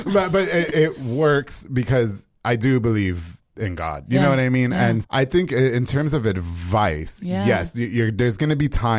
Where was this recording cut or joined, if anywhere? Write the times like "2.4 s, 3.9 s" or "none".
5.0 s